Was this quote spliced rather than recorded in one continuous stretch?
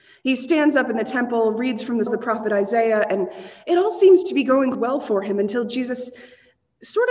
yes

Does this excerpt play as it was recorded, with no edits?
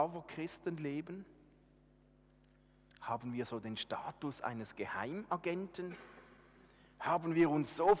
yes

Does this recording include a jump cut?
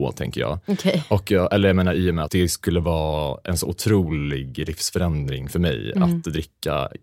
yes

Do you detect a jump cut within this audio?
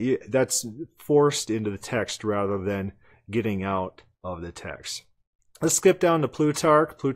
no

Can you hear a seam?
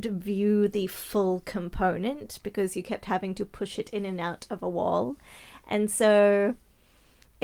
no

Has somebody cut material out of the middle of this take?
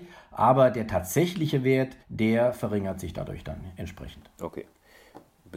yes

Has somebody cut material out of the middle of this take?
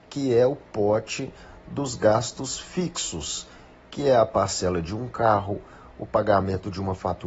no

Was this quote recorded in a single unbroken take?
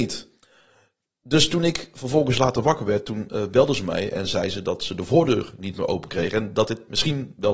yes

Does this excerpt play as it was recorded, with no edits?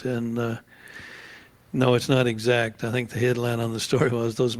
yes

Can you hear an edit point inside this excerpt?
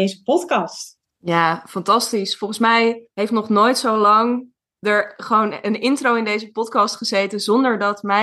yes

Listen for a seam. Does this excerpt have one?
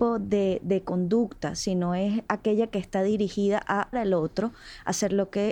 yes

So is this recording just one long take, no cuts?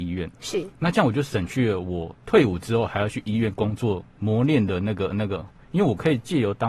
no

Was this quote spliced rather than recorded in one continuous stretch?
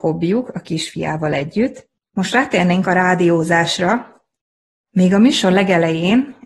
no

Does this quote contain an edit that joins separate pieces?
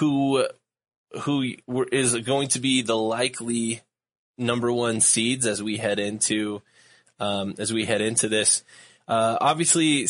no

